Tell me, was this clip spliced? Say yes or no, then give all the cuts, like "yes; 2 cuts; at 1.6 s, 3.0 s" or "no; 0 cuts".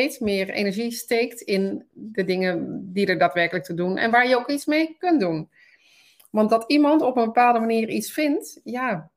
no; 0 cuts